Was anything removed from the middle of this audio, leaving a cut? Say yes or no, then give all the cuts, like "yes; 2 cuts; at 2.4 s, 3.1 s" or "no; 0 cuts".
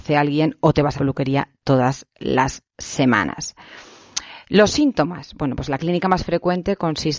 yes; 1 cut; at 0.9 s